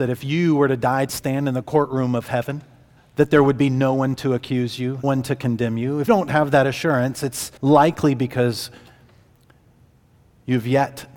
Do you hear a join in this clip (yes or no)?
yes